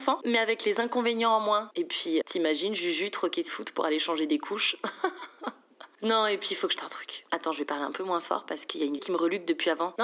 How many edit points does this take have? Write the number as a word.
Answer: four